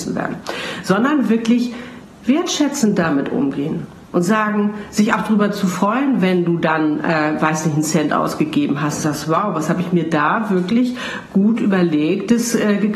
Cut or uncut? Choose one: uncut